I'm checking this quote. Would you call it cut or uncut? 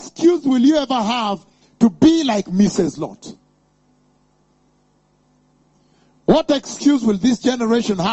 uncut